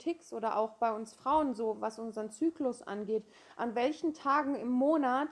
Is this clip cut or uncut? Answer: uncut